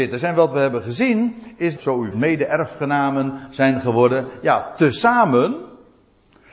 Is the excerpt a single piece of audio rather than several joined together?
no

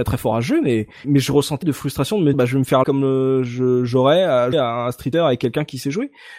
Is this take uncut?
no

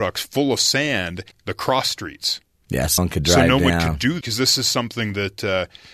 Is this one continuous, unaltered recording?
no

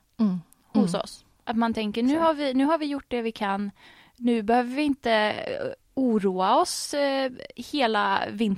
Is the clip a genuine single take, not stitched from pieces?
yes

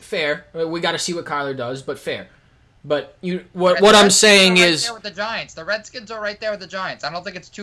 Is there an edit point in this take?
no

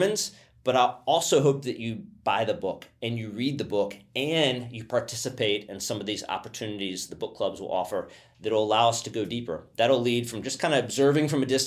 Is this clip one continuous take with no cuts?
yes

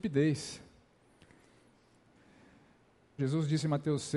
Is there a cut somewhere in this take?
yes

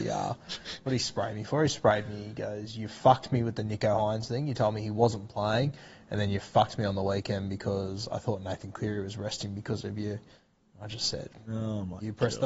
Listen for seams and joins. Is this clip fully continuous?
yes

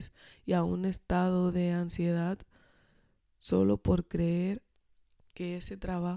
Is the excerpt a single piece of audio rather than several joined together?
yes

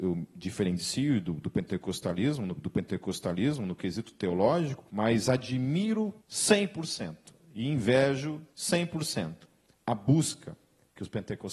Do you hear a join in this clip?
yes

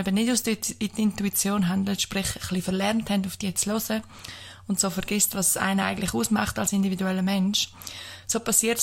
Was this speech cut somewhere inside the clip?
no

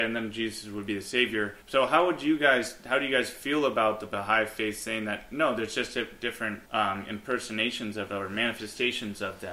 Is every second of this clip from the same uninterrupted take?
no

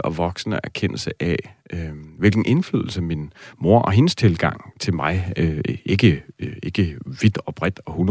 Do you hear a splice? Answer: no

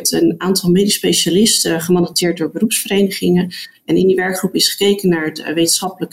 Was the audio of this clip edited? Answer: no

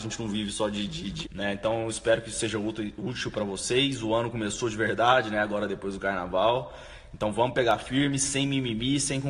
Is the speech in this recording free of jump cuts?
no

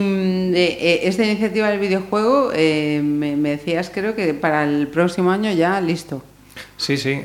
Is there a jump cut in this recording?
no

